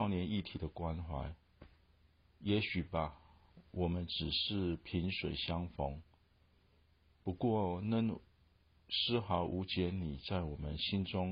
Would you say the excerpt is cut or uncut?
uncut